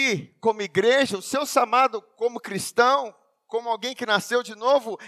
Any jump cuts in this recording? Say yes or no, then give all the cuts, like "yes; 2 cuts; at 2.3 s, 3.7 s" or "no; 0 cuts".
no; 0 cuts